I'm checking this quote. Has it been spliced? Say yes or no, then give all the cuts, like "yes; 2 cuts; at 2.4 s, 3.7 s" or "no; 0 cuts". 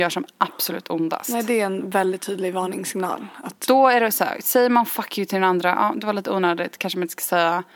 no; 0 cuts